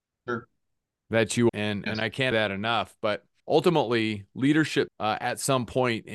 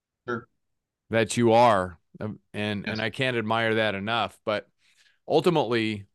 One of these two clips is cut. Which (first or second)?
first